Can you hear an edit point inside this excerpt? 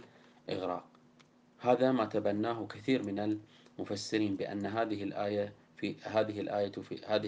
no; 0 cuts

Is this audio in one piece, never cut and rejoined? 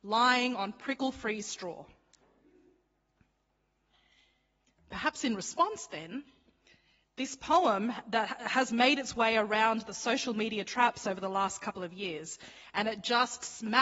yes; 0 cuts

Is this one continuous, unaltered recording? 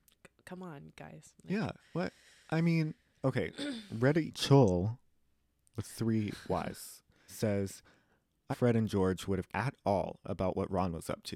no; 7 cuts; at 1.4 s, 1.8 s, 3.5 s, 4.3 s, 7.3 s, 8.5 s, 9.5 s

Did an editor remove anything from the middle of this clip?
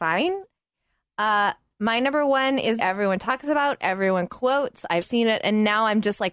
yes; 2 cuts; at 2.8 s, 5.0 s

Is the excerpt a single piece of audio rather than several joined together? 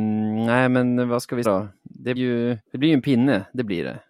no; 3 cuts; at 1.4 s, 2.2 s, 2.7 s

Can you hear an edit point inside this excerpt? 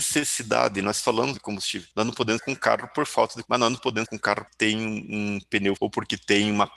yes; 7 cuts; at 1.3 s, 2.4 s, 2.9 s, 3.4 s, 4.0 s, 4.5 s, 5.8 s

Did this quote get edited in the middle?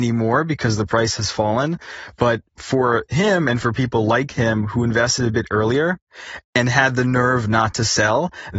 no; 0 cuts

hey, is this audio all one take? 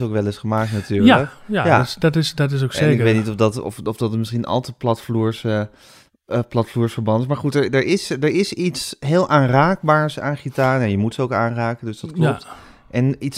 yes; 0 cuts

